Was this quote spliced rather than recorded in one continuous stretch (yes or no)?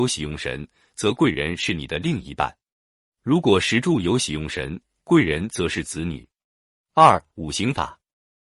no